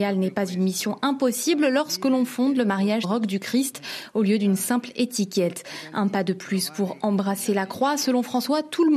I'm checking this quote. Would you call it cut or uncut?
cut